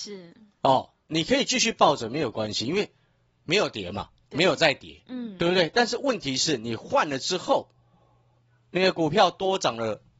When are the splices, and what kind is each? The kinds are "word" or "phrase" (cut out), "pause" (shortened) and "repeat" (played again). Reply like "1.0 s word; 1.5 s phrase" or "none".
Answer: none